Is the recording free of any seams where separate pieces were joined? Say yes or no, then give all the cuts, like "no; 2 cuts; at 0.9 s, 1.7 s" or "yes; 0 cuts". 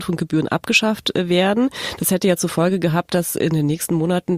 yes; 0 cuts